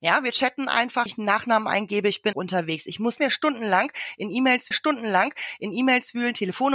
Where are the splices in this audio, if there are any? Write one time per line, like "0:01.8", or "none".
0:01.1
0:02.3
0:03.2
0:04.7

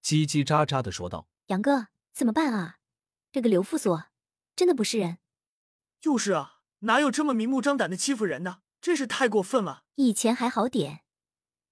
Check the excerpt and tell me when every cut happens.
0:01.4
0:02.0
0:06.7
0:08.7
0:09.9

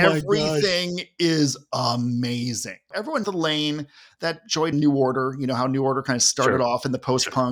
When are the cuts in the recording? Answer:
0:03.2
0:04.7

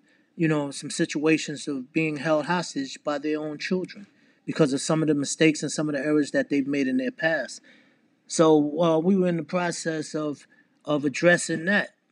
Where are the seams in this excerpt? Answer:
none

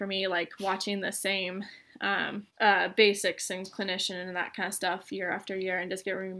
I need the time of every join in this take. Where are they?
0:02.5

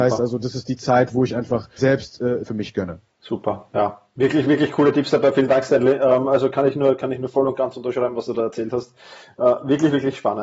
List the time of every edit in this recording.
0:01.8
0:02.4
0:03.1

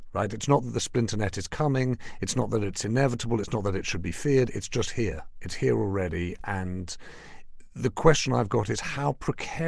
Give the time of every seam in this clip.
none

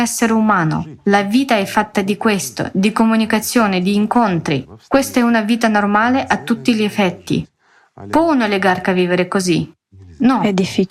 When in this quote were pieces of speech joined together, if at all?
none

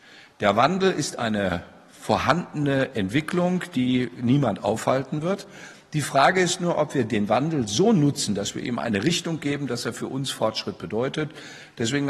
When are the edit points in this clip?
none

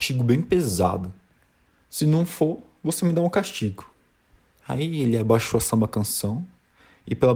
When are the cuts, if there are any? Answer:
none

